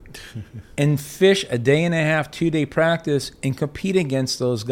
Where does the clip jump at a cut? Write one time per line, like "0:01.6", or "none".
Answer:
none